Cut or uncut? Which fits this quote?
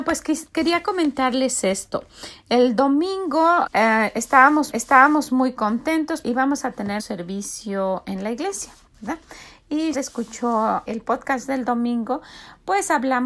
cut